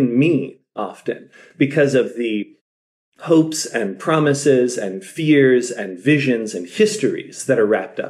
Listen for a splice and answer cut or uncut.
uncut